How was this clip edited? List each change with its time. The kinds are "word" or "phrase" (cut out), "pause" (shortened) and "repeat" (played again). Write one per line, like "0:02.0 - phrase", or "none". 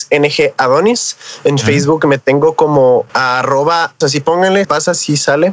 0:03.1 - pause
0:04.0 - word
0:04.6 - word